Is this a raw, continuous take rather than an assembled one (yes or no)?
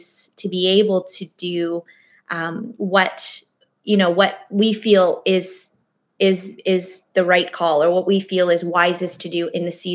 yes